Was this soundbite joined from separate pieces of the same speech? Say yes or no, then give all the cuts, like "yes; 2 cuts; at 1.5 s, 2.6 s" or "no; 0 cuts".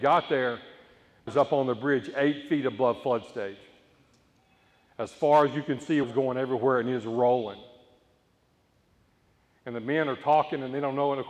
yes; 2 cuts; at 1.3 s, 6.0 s